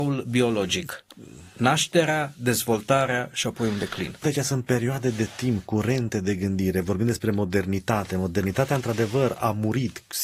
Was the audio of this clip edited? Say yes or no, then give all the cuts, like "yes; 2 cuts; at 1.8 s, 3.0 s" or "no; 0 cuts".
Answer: yes; 1 cut; at 4.2 s